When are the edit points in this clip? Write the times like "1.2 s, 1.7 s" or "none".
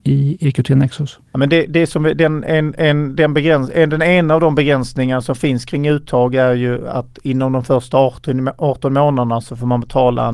1.3 s